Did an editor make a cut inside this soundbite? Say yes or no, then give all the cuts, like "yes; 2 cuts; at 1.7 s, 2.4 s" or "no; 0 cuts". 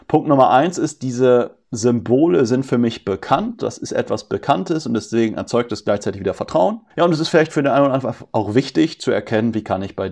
yes; 1 cut; at 6.9 s